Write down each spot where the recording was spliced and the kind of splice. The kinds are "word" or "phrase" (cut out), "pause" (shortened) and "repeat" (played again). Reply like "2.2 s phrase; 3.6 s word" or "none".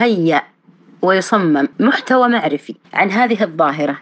1.7 s pause; 2.8 s pause